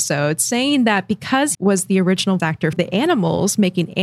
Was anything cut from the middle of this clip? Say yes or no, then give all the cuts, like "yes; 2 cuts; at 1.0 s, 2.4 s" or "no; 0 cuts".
yes; 3 cuts; at 1.5 s, 2.4 s, 2.7 s